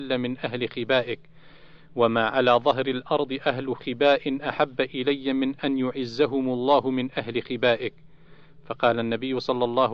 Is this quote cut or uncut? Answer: uncut